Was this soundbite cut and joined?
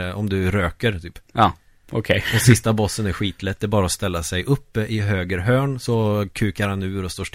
no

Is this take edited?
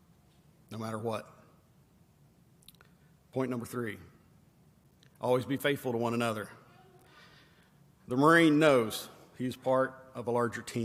no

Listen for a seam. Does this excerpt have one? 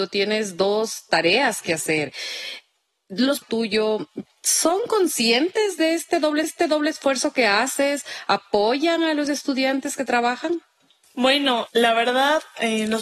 yes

